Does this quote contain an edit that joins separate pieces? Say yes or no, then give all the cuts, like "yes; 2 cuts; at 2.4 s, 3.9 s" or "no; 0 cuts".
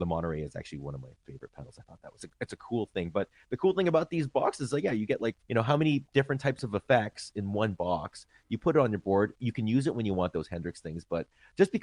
yes; 2 cuts; at 2.2 s, 5.4 s